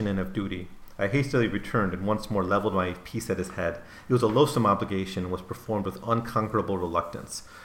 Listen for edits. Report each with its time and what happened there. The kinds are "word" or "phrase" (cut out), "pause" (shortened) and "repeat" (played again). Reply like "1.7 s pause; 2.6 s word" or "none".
none